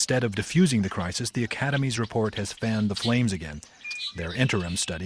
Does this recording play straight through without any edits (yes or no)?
yes